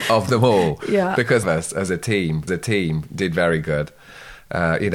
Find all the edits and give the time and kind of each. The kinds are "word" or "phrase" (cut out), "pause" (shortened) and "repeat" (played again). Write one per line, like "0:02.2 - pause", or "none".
0:01.4 - phrase
0:02.5 - repeat